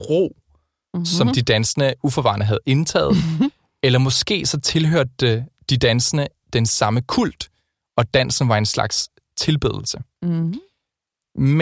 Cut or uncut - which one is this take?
uncut